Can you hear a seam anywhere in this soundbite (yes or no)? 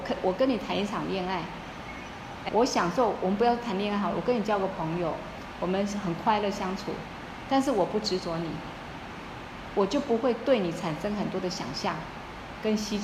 yes